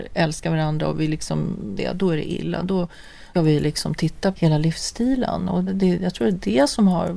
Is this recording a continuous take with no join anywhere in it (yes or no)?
no